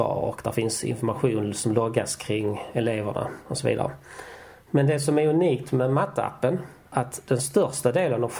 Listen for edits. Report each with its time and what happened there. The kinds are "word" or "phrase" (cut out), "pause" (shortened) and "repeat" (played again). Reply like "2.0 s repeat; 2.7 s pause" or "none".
6.9 s word